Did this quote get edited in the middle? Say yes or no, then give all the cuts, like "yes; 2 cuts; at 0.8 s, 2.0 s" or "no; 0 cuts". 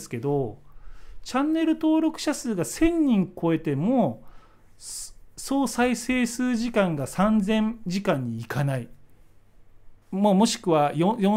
yes; 1 cut; at 10.0 s